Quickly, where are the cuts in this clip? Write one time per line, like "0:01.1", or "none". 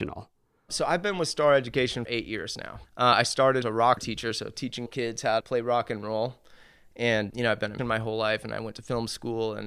0:02.0
0:03.6
0:04.0
0:04.9
0:05.4
0:07.3
0:07.8